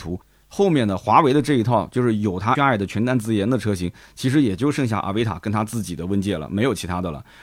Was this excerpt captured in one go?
no; 1 cut; at 2.5 s

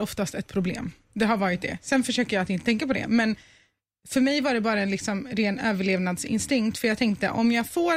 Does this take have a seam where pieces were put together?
no; 0 cuts

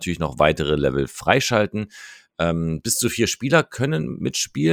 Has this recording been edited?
no; 0 cuts

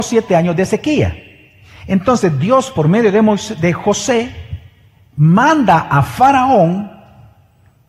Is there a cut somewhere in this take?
no; 0 cuts

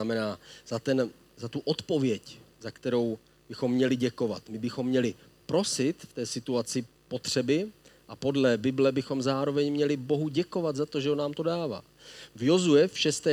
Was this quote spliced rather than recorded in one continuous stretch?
no; 0 cuts

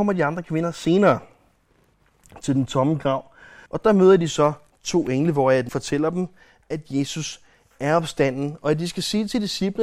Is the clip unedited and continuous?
no; 2 cuts; at 3.7 s, 5.7 s

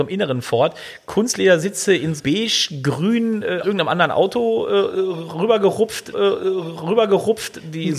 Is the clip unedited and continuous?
no; 3 cuts; at 2.2 s, 3.6 s, 6.1 s

